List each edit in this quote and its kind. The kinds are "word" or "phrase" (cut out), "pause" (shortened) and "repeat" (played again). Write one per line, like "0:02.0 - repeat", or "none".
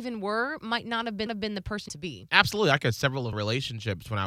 0:01.3 - repeat
0:01.9 - phrase
0:02.8 - phrase
0:03.3 - word